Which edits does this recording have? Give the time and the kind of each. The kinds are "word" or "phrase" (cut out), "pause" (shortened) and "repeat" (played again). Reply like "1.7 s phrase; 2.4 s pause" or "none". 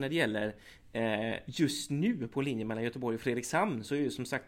none